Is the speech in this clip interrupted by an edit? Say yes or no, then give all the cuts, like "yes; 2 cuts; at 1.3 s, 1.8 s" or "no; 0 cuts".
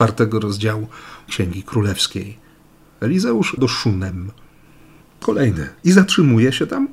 yes; 4 cuts; at 1.3 s, 3.6 s, 5.2 s, 5.8 s